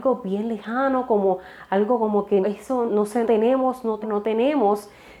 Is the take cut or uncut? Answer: cut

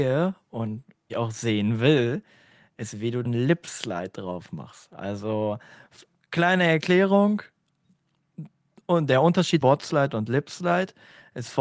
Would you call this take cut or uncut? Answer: cut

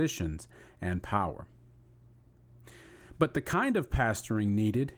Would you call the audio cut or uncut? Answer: uncut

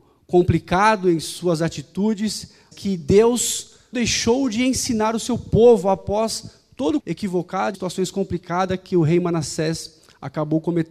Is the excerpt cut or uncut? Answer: cut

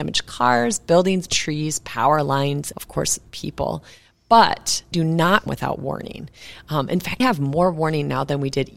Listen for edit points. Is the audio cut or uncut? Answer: cut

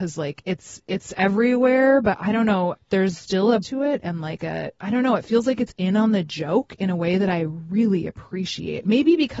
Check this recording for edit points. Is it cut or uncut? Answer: cut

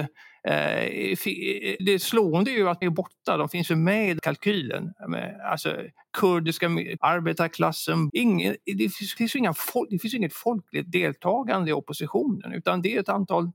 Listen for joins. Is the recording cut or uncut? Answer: cut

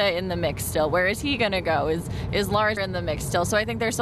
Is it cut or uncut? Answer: cut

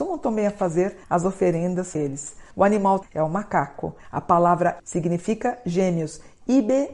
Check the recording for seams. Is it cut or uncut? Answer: cut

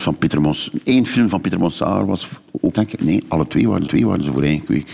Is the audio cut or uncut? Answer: cut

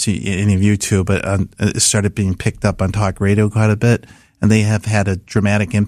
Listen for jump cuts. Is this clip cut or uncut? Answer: uncut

